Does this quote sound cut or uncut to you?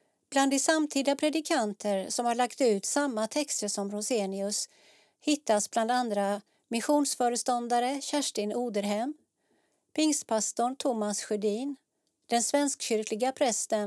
cut